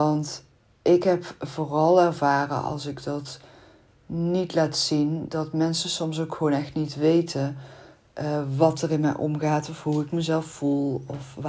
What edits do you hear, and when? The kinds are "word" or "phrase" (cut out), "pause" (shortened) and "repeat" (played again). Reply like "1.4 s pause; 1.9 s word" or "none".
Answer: none